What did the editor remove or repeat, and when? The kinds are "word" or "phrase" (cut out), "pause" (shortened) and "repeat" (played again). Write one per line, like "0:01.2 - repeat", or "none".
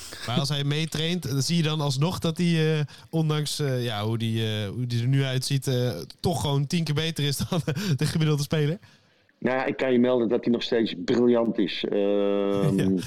none